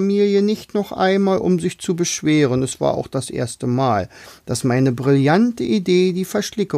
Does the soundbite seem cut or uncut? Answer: uncut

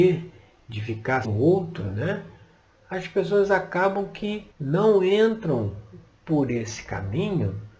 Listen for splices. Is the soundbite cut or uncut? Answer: cut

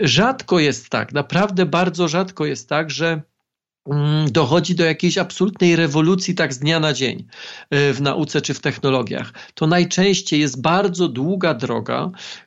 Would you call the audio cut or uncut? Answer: uncut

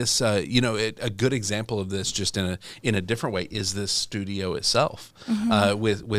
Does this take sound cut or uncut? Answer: uncut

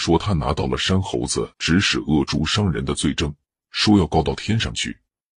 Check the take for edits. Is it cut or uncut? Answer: cut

